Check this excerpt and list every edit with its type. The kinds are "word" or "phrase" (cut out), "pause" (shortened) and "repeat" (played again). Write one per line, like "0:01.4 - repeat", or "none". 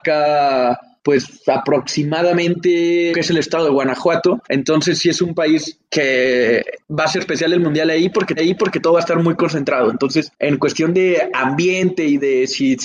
0:03.1 - phrase
0:04.4 - pause
0:05.9 - word
0:07.2 - word
0:08.4 - repeat